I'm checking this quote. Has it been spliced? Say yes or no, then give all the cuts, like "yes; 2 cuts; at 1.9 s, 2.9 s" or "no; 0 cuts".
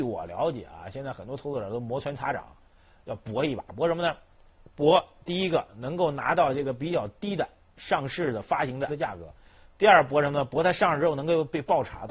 yes; 1 cut; at 8.9 s